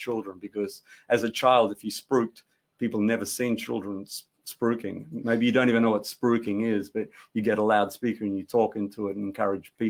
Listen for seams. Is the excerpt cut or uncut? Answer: uncut